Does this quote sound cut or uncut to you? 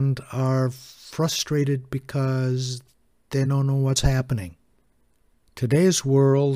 uncut